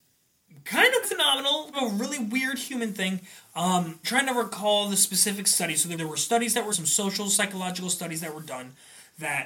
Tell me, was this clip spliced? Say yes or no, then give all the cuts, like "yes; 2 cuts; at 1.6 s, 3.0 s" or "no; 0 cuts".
yes; 5 cuts; at 1.0 s, 1.7 s, 4.0 s, 5.9 s, 6.7 s